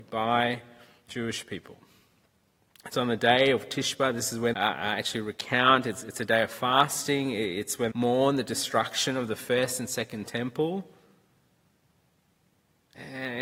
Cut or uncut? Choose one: cut